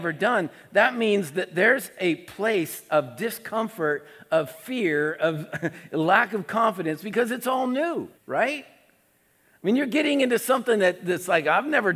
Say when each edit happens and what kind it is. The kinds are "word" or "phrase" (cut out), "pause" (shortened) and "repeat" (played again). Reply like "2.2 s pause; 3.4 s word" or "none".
8.1 s pause